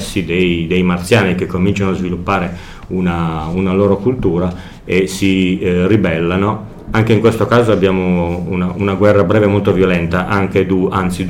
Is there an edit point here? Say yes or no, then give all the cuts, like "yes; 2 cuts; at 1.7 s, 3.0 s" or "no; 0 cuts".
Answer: no; 0 cuts